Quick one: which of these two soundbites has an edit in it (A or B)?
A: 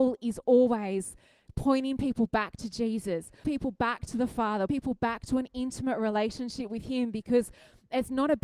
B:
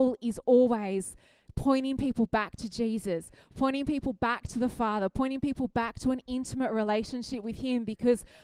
A